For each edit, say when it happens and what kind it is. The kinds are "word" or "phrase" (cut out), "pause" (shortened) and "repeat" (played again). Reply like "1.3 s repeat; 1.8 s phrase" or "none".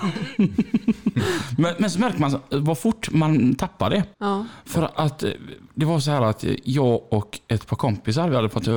4.1 s pause